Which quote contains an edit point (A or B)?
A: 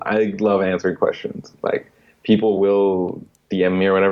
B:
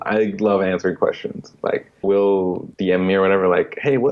B